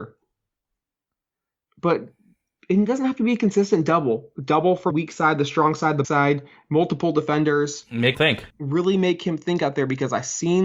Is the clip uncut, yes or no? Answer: no